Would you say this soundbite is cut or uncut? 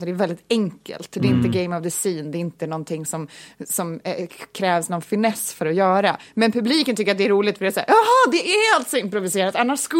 uncut